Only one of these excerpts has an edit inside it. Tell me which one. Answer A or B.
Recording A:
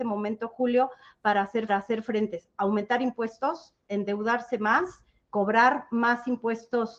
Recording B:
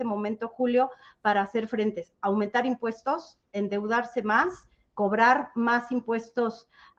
A